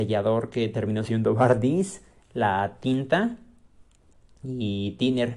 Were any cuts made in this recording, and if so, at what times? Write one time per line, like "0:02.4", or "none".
none